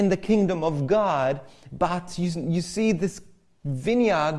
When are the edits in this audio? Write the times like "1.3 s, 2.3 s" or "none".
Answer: none